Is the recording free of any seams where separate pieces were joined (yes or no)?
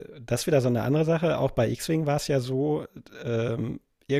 yes